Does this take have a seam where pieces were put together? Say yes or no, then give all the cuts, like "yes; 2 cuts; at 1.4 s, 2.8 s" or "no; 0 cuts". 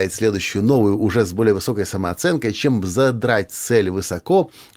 no; 0 cuts